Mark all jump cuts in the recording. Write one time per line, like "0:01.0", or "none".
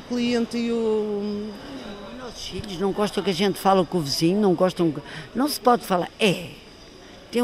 none